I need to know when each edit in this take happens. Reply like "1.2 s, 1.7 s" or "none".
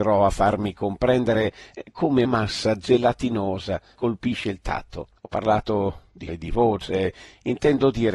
2.2 s, 3.9 s, 5.2 s, 6.3 s